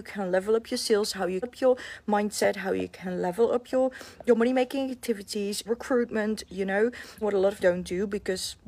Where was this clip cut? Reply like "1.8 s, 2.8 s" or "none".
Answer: 1.4 s, 4.3 s, 5.6 s, 7.2 s, 7.6 s

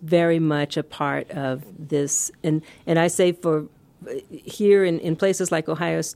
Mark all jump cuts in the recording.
none

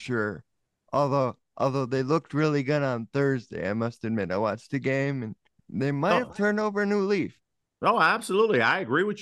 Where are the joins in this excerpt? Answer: none

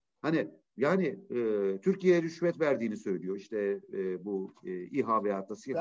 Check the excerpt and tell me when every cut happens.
none

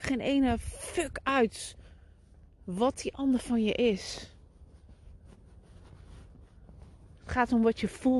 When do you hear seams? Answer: none

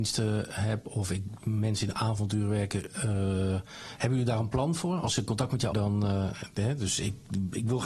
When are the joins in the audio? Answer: 1.9 s, 5.7 s

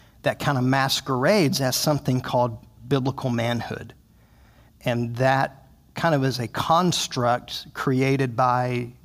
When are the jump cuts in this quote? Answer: none

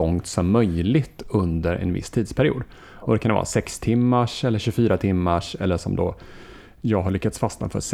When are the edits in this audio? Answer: none

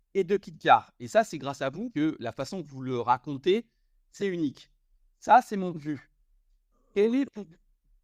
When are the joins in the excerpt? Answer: 1.9 s, 4.2 s, 5.7 s

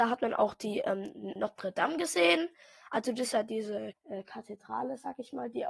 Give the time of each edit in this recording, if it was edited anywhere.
1.4 s, 3.9 s

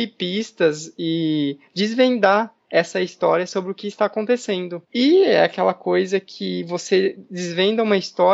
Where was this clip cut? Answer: none

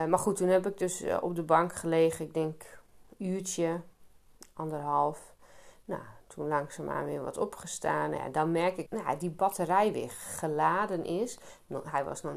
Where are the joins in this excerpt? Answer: 8.9 s

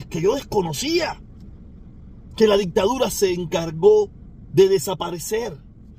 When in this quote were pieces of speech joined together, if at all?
none

